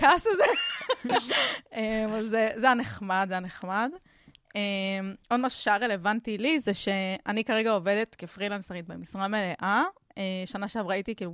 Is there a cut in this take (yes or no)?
yes